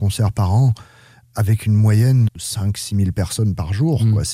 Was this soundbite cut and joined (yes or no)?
yes